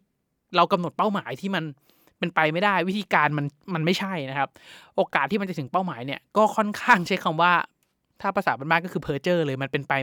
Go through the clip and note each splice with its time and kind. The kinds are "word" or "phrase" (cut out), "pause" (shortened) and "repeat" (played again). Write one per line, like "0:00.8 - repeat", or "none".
none